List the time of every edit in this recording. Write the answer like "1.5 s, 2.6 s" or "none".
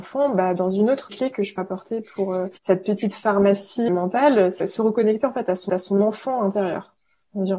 1.1 s, 1.6 s, 2.6 s, 3.9 s, 4.6 s, 5.7 s